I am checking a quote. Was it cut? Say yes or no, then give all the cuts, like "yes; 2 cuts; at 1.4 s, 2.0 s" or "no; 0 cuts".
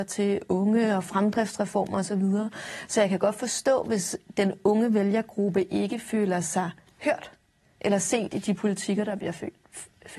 no; 0 cuts